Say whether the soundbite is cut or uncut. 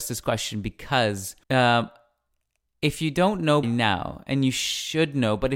cut